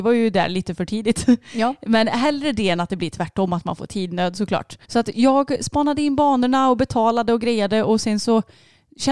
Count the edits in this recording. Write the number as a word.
one